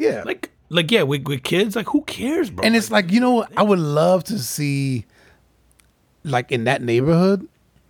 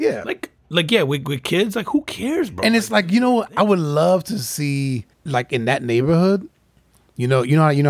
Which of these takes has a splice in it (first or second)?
second